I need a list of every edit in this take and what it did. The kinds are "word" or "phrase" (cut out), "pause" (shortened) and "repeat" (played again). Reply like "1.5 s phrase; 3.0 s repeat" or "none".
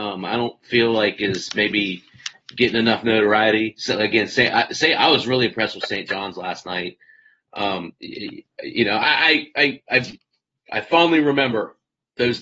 none

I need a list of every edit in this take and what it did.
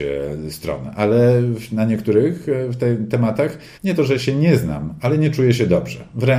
3.7 s pause

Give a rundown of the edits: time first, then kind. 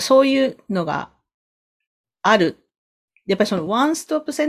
none

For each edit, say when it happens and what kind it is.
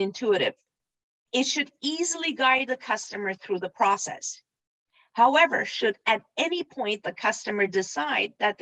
none

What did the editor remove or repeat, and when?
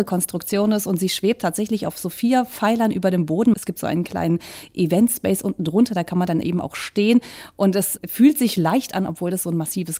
none

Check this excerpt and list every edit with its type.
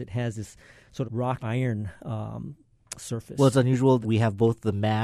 1.0 s word; 1.4 s word; 4.0 s word

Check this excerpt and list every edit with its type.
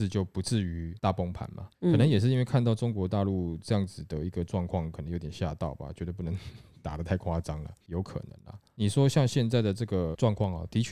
1.7 s pause

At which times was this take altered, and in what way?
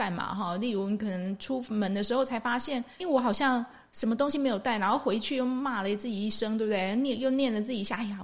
3.0 s word

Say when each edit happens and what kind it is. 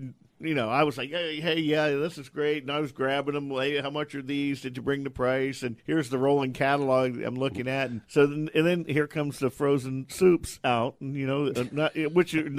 5.8 s pause; 8.0 s pause

